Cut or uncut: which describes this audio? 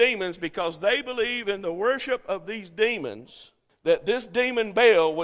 uncut